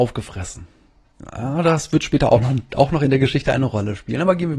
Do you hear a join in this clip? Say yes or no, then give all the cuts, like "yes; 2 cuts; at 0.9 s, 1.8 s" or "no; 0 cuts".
no; 0 cuts